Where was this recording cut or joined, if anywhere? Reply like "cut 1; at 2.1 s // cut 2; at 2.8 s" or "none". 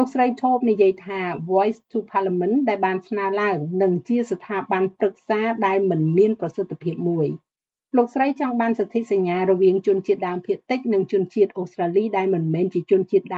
none